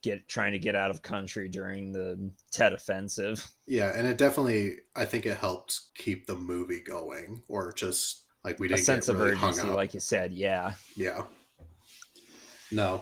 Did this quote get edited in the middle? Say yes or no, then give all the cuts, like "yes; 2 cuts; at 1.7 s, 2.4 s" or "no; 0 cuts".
yes; 3 cuts; at 3.6 s, 5.9 s, 8.3 s